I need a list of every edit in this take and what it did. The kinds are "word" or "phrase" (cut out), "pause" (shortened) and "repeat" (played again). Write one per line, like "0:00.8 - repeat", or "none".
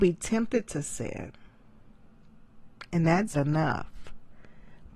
0:03.3 - word